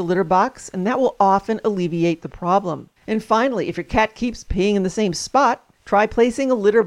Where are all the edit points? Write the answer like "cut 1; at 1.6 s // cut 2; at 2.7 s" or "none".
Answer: cut 1; at 3.0 s // cut 2; at 5.7 s